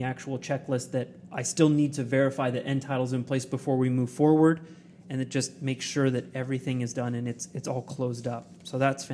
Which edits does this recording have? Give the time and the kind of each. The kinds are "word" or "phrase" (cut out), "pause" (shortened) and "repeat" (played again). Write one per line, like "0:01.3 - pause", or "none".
none